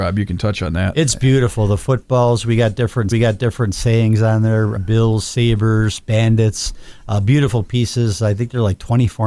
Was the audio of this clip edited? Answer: yes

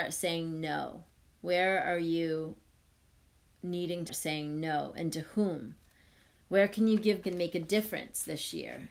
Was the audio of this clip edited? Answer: yes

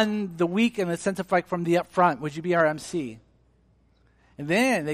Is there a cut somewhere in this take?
no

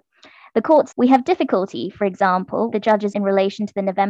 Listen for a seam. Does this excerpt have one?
yes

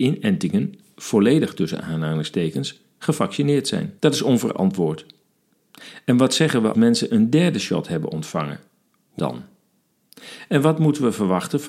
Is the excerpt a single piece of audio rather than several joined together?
no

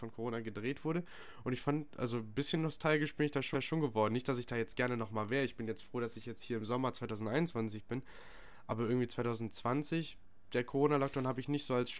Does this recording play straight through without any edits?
no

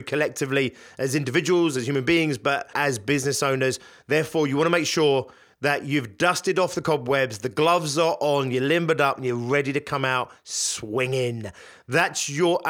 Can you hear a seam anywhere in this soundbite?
yes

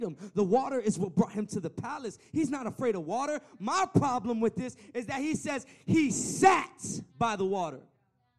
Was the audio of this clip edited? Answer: yes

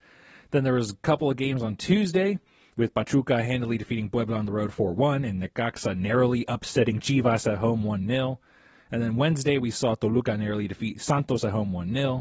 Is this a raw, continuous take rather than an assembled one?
yes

